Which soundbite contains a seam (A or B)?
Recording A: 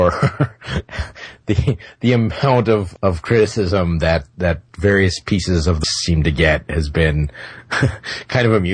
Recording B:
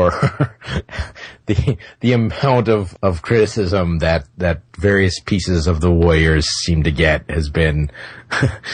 A